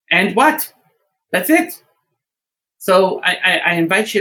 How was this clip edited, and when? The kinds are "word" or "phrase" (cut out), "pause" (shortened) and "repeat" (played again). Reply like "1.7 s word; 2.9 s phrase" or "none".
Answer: none